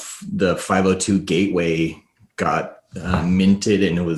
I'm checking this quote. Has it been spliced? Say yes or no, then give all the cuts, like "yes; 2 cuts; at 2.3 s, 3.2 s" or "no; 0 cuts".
no; 0 cuts